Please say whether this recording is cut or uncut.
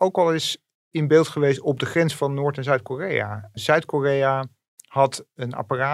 uncut